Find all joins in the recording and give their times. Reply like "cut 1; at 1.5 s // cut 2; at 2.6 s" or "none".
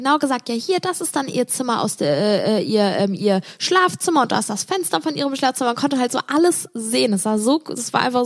none